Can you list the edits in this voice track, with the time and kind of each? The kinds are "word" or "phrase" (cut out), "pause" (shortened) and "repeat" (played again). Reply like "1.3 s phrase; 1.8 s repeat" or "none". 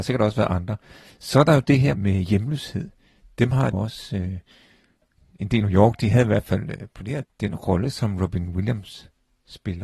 1.9 s word; 3.7 s word; 5.6 s word; 7.2 s word